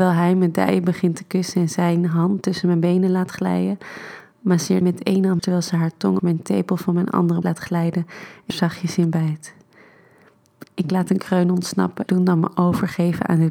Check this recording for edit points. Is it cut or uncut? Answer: cut